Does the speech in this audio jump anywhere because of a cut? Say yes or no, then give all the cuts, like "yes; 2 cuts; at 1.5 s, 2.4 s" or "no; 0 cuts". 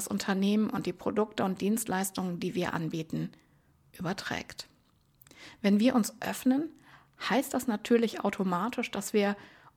no; 0 cuts